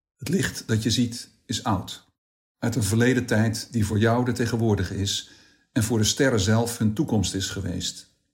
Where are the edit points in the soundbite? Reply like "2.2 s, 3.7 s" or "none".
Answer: none